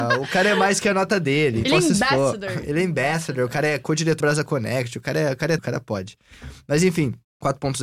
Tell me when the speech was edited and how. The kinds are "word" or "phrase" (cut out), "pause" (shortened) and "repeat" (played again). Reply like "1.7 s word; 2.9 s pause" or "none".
1.6 s word; 4.2 s word; 5.6 s word